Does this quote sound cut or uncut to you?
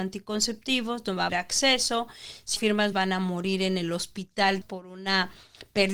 cut